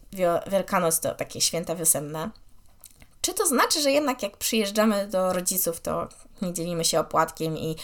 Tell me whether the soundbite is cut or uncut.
uncut